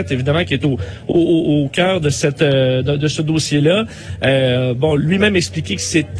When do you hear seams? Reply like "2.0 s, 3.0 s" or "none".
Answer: none